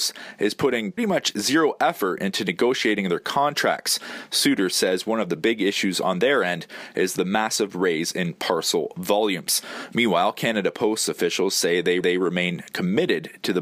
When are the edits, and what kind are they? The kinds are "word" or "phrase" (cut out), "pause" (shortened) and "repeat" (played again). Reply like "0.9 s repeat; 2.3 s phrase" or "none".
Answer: 1.0 s word; 12.0 s repeat